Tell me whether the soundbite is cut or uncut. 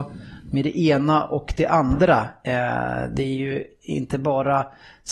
uncut